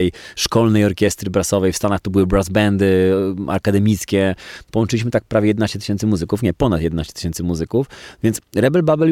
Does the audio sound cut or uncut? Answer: uncut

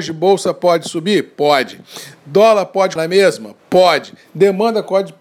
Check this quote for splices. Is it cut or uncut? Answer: cut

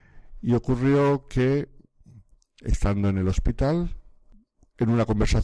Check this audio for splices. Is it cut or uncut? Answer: uncut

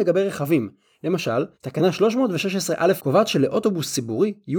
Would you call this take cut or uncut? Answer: cut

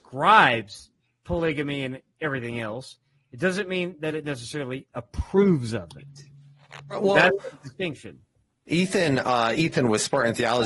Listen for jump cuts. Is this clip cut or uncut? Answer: uncut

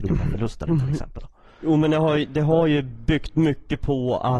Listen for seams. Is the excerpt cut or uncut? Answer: uncut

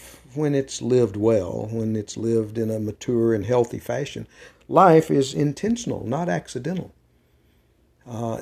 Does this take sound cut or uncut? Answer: uncut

